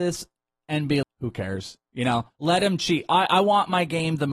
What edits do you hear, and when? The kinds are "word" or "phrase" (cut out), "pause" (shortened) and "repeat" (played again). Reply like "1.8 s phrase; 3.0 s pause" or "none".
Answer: 1.0 s word; 2.3 s word